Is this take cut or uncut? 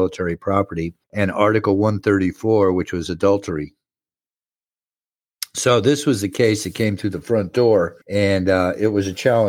cut